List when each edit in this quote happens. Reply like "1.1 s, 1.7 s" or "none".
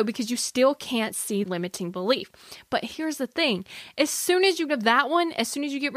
1.4 s, 4.7 s